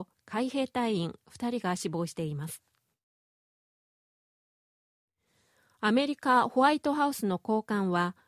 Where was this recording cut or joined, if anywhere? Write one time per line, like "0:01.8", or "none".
none